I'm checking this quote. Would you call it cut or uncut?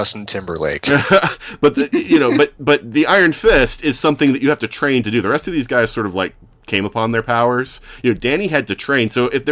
uncut